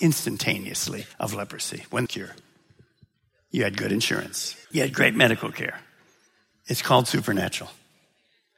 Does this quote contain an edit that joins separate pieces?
yes; 3 cuts; at 1.1 s, 2.1 s, 4.6 s

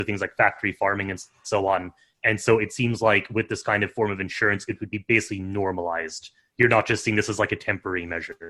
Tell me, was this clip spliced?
no; 0 cuts

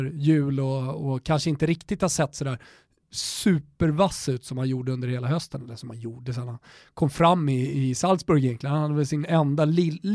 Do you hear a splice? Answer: no; 0 cuts

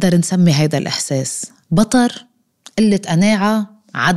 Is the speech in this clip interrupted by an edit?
no; 0 cuts

